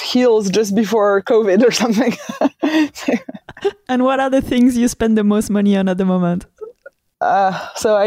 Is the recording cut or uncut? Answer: uncut